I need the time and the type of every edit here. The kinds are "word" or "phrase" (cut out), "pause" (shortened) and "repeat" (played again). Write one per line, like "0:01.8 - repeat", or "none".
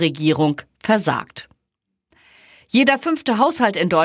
none